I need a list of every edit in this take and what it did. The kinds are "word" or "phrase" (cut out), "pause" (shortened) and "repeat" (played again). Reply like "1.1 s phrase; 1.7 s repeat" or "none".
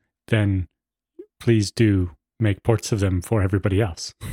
1.3 s pause